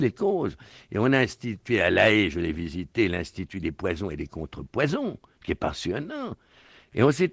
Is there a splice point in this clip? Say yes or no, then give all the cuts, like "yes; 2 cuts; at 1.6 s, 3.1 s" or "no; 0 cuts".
no; 0 cuts